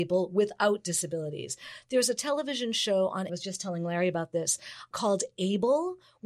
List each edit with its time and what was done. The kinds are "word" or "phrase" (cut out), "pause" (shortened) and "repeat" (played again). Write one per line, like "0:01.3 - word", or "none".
0:03.3 - phrase
0:04.9 - word

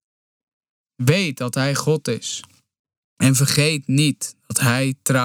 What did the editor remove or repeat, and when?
none

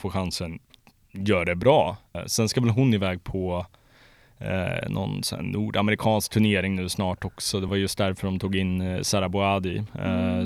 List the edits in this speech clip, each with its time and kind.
none

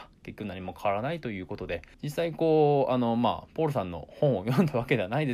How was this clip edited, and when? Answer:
0:01.9 - pause

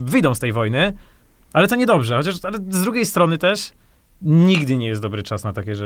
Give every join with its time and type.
none

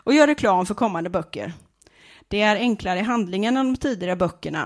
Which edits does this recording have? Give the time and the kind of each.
none

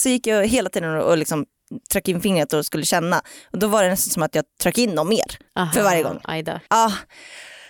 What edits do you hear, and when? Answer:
0:05.5 - pause
0:06.7 - pause

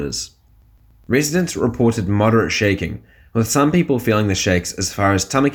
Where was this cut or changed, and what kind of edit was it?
none

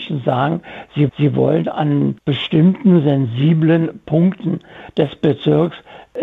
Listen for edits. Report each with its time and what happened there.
0:01.1 - repeat

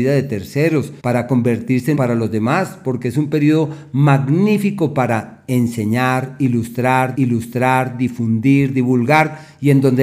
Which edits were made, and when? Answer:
0:01.0 - pause
0:01.9 - phrase
0:07.1 - repeat

